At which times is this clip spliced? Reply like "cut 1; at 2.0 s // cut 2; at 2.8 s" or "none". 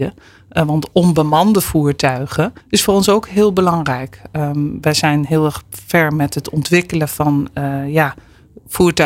cut 1; at 2.6 s